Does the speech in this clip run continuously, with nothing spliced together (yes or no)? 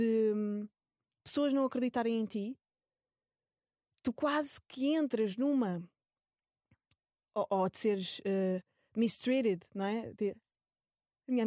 yes